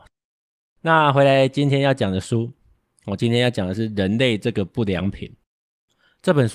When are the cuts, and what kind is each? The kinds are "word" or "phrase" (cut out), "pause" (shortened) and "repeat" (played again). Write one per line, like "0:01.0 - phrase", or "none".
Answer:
none